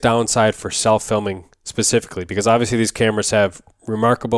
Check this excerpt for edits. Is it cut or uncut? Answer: uncut